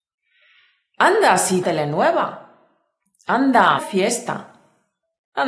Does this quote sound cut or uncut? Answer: cut